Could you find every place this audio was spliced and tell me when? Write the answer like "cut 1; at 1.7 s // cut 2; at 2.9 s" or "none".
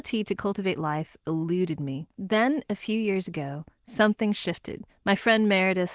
cut 1; at 2.1 s // cut 2; at 4.9 s